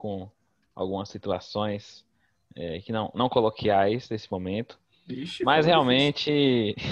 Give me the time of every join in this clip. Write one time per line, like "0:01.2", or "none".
none